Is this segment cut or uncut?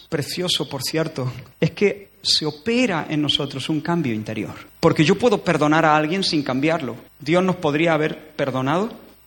cut